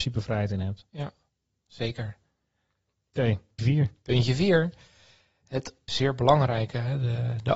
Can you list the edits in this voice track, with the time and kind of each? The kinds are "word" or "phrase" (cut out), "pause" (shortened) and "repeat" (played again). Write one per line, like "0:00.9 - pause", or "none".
0:03.6 - word
0:05.9 - word

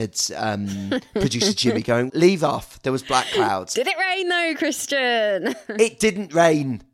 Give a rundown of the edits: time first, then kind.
0:02.1 - word

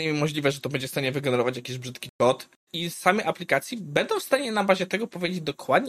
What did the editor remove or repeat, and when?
0:02.7 - word

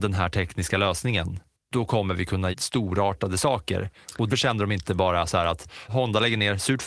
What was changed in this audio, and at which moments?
0:01.6 - pause
0:02.5 - word
0:04.3 - word
0:05.9 - word

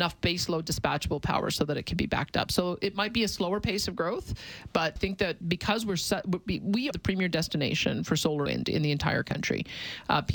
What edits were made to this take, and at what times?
0:05.0 - word
0:05.4 - word
0:06.9 - word
0:08.5 - word

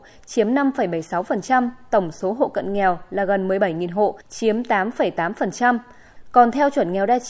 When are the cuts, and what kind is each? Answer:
0:04.2 - pause

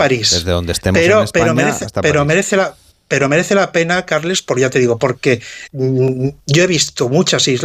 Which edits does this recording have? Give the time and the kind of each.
0:02.9 - pause
0:05.7 - word

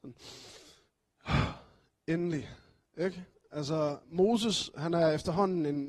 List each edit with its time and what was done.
0:04.0 - pause

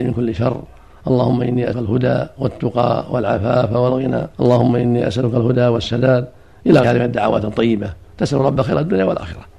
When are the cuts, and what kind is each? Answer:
0:01.7 - word
0:04.3 - pause
0:06.8 - word

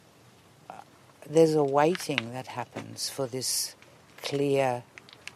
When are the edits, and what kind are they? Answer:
none

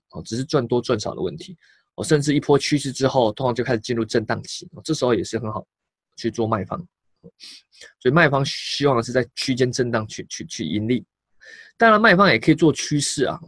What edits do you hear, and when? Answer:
none

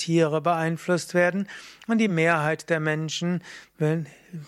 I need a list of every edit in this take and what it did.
none

